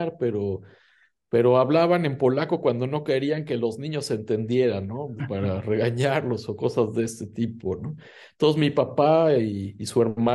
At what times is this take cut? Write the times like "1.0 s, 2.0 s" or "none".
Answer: none